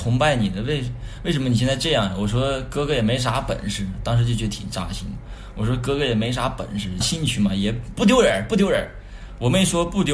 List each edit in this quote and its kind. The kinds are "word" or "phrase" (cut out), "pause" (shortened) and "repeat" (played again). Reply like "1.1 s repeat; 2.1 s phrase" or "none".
7.0 s phrase